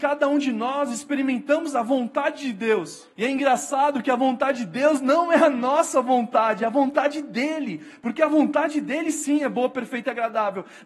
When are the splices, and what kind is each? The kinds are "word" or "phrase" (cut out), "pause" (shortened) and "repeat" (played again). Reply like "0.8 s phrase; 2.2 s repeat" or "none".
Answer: 3.1 s pause